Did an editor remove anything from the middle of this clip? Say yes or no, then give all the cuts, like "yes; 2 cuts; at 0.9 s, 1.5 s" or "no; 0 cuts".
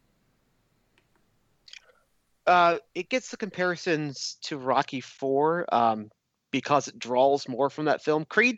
no; 0 cuts